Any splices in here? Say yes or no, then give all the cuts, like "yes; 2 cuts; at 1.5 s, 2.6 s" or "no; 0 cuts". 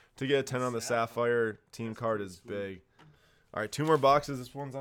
no; 0 cuts